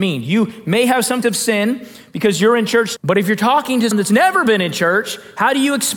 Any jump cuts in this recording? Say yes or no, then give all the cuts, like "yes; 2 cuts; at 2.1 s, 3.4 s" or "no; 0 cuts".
yes; 3 cuts; at 1.2 s, 3.0 s, 3.9 s